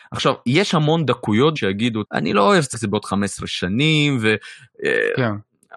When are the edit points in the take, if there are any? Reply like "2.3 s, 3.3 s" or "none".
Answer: 1.6 s, 2.0 s, 2.7 s